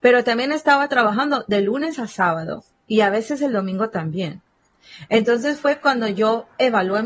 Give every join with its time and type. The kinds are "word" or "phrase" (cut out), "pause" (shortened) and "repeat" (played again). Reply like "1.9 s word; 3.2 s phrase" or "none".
none